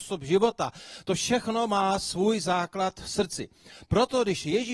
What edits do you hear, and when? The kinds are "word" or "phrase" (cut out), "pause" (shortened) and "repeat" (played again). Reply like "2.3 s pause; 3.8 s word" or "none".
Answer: none